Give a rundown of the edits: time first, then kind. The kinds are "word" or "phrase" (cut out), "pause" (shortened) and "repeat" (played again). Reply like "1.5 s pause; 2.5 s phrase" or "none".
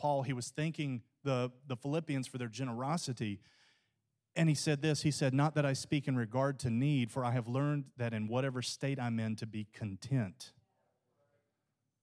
none